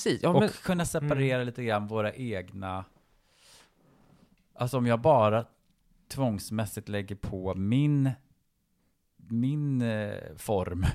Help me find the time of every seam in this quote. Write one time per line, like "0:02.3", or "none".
none